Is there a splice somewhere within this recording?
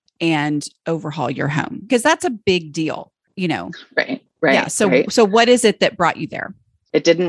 yes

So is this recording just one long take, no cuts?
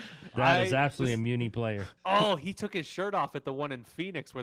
no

